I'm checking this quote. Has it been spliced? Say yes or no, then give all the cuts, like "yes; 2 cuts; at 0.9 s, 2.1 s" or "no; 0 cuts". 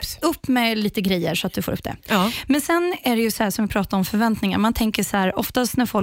no; 0 cuts